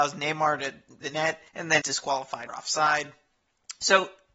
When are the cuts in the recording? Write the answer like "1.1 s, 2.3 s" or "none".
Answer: 1.0 s, 1.5 s, 1.8 s, 2.5 s